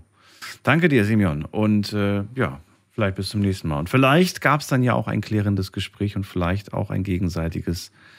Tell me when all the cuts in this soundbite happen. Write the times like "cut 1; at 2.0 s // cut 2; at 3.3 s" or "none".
none